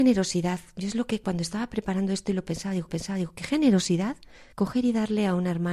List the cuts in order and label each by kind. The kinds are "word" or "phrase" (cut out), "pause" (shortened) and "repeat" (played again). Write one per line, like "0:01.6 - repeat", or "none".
0:02.9 - repeat
0:04.5 - pause